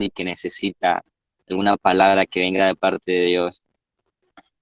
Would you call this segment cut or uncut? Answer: uncut